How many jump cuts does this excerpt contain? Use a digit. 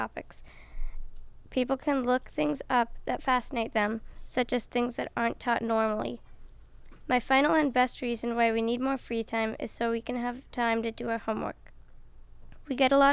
1